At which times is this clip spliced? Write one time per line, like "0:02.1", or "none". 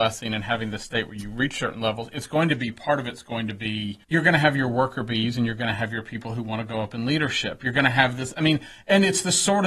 0:04.0